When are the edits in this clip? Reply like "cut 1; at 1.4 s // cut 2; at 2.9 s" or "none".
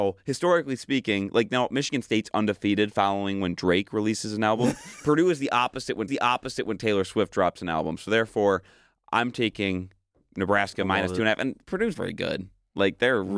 cut 1; at 6.1 s // cut 2; at 11.9 s